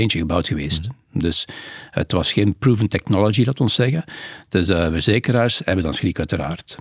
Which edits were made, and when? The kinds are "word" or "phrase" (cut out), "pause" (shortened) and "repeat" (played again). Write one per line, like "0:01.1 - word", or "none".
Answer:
0:01.0 - pause